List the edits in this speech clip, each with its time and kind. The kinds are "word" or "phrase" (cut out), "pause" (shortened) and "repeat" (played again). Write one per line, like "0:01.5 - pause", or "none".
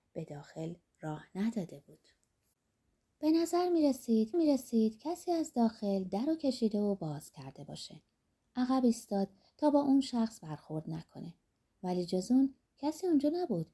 0:04.3 - repeat